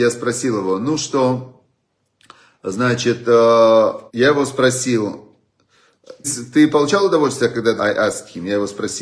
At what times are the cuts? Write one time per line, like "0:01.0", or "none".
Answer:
0:04.1
0:06.2
0:07.8

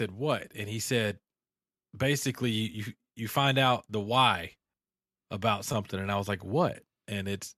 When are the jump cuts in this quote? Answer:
none

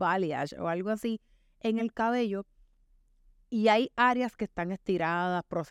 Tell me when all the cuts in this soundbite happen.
none

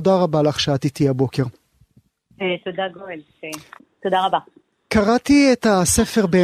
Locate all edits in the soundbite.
none

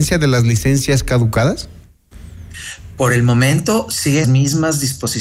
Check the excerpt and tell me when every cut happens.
0:04.2

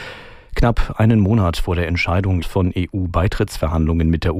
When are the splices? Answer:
0:02.4

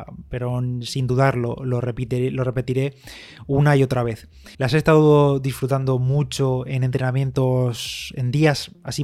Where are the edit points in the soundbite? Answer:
0:04.5

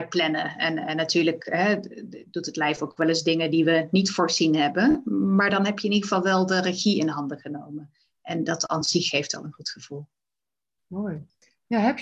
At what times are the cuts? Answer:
none

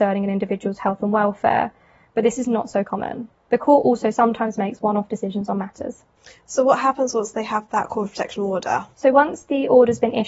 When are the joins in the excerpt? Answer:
none

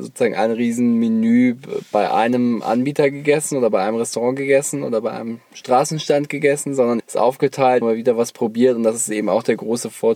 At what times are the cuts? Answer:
0:07.0
0:07.8

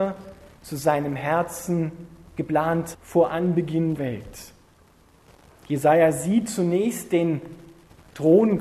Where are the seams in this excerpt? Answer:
0:02.9
0:04.0

